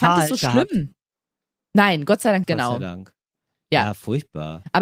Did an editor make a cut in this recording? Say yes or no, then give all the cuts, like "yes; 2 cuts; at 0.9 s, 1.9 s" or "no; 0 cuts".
yes; 1 cut; at 2.4 s